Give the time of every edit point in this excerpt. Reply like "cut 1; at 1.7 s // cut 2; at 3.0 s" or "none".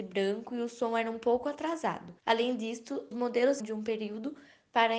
cut 1; at 2.2 s // cut 2; at 3.1 s // cut 3; at 3.6 s